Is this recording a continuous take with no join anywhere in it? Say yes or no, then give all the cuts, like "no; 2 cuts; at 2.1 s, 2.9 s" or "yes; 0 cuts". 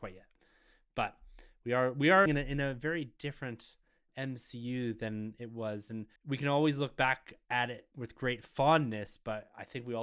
no; 3 cuts; at 2.3 s, 6.2 s, 7.9 s